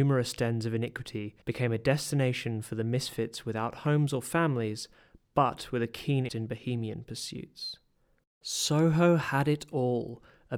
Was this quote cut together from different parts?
yes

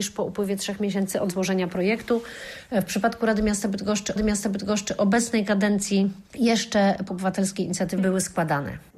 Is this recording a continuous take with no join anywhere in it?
no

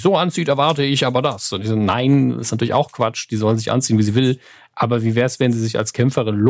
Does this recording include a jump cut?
no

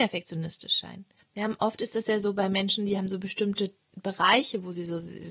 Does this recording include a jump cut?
yes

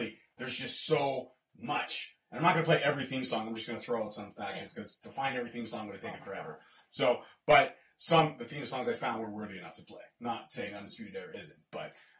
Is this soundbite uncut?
yes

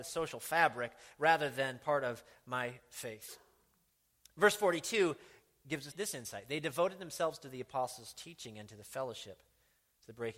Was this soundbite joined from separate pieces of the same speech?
yes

